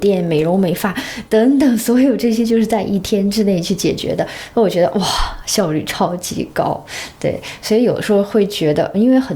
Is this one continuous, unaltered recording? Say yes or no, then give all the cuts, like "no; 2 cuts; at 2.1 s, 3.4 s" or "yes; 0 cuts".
yes; 0 cuts